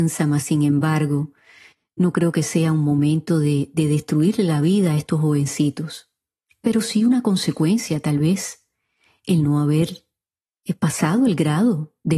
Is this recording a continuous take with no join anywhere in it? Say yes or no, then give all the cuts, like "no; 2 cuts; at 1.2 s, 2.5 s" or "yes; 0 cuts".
yes; 0 cuts